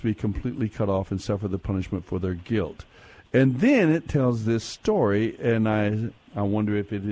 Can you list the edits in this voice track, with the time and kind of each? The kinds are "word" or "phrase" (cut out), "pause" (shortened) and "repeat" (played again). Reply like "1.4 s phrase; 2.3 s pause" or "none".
none